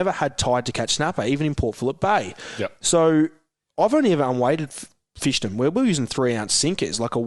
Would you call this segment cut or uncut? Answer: uncut